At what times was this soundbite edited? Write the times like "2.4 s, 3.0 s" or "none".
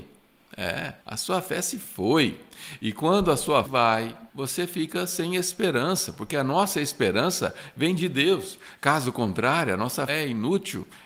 1.0 s, 3.7 s, 4.3 s, 10.1 s